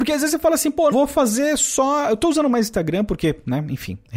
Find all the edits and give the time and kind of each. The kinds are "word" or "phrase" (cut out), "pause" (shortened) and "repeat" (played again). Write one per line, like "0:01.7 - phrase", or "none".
0:00.9 - word

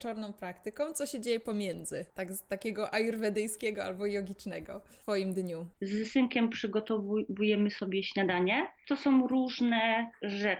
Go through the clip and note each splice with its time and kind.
none

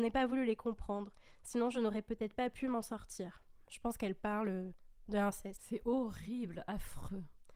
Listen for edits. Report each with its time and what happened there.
none

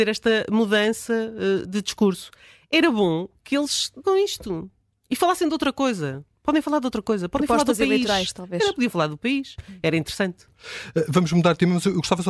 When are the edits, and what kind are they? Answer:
0:01.6 - word
0:04.0 - word

